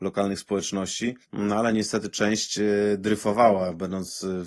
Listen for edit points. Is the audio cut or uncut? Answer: cut